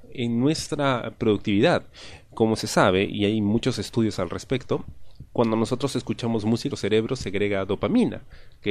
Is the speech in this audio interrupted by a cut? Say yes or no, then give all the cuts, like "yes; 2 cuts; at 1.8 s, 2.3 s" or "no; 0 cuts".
yes; 1 cut; at 6.7 s